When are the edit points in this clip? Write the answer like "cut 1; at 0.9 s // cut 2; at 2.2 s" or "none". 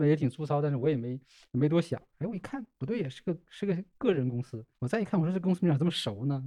cut 1; at 4.7 s